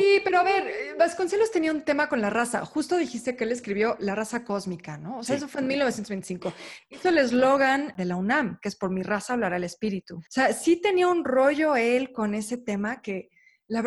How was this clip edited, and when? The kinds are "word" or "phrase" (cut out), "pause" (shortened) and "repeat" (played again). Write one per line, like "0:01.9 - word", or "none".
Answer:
0:10.3 - pause